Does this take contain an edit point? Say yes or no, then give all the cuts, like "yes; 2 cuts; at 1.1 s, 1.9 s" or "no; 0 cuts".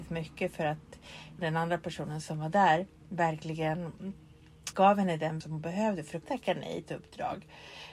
yes; 5 cuts; at 1.4 s, 4.7 s, 5.4 s, 6.2 s, 6.8 s